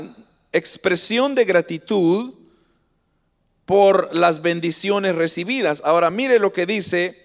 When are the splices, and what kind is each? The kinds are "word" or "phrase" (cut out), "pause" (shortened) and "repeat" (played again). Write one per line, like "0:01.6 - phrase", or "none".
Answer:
none